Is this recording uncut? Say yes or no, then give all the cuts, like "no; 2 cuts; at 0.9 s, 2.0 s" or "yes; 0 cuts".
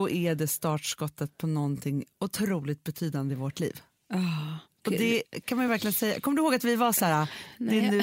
yes; 0 cuts